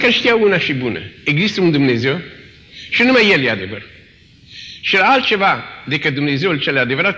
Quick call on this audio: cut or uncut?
uncut